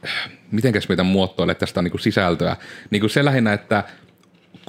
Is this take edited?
yes; 1 cut; at 1.8 s

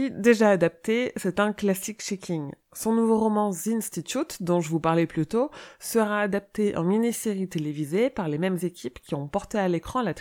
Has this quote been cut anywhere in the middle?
no; 0 cuts

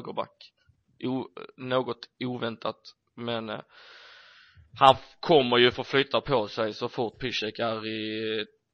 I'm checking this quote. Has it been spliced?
no; 0 cuts

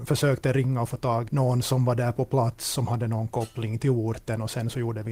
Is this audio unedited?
no; 2 cuts; at 1.3 s, 3.8 s

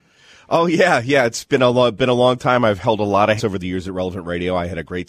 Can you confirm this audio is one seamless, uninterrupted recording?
no; 1 cut; at 3.4 s

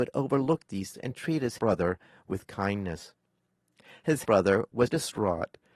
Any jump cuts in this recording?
yes; 4 cuts; at 0.9 s, 1.6 s, 4.2 s, 4.9 s

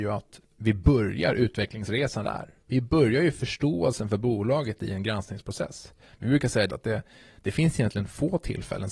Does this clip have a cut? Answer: yes; 4 cuts; at 2.2 s, 2.6 s, 6.1 s, 6.7 s

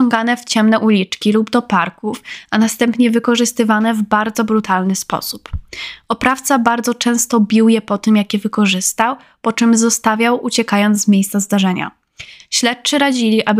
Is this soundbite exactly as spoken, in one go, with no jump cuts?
yes; 0 cuts

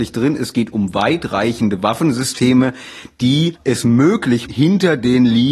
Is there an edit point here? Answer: yes; 2 cuts; at 3.5 s, 4.5 s

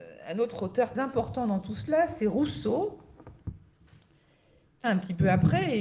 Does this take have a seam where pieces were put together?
yes; 2 cuts; at 0.9 s, 4.8 s

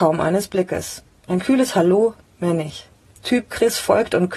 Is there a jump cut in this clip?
no; 0 cuts

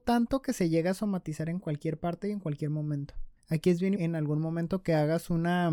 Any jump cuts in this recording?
yes; 2 cuts; at 3.4 s, 4.0 s

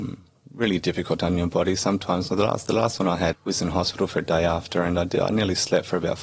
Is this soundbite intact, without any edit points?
no; 1 cut; at 3.3 s

